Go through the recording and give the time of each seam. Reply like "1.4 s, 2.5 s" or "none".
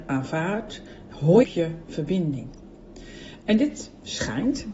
1.4 s